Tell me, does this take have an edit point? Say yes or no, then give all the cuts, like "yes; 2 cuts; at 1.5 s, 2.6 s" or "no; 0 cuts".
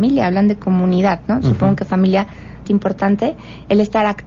yes; 1 cut; at 2.6 s